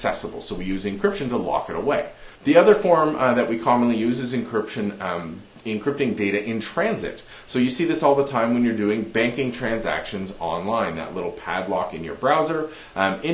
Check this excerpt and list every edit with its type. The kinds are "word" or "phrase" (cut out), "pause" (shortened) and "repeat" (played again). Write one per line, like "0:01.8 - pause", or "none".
0:02.4 - pause